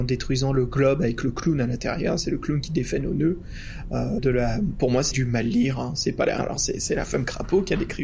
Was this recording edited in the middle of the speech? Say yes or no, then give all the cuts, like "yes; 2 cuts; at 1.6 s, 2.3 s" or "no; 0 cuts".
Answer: yes; 3 cuts; at 4.2 s, 5.1 s, 6.4 s